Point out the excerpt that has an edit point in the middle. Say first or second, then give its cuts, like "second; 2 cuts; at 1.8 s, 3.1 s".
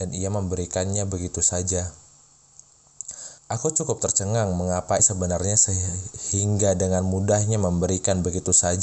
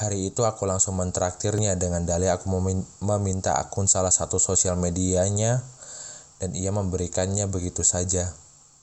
first; 2 cuts; at 3.4 s, 5.0 s